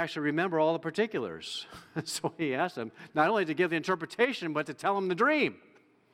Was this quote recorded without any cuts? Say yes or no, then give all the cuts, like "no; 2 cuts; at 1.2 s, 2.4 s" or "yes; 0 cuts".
yes; 0 cuts